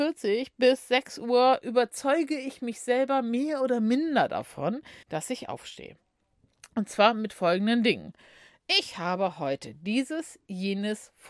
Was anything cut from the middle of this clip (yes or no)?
yes